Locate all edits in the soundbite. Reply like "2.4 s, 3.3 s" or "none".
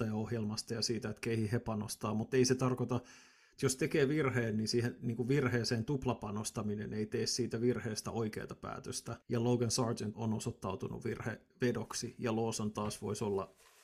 9.2 s, 10.1 s